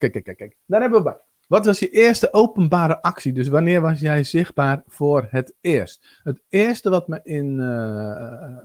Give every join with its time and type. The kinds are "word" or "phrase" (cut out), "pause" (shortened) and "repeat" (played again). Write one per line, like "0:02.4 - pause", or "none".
none